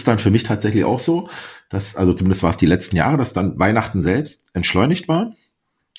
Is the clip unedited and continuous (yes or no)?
yes